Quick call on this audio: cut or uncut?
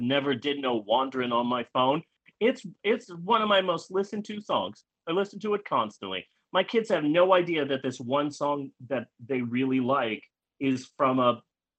cut